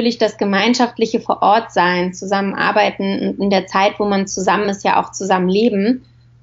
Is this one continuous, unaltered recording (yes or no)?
yes